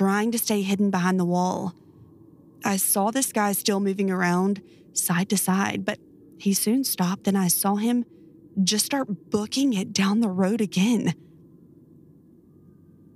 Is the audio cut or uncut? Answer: uncut